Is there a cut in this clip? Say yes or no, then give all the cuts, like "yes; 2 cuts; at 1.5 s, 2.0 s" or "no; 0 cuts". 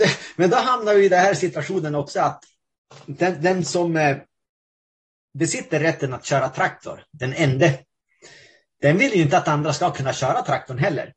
no; 0 cuts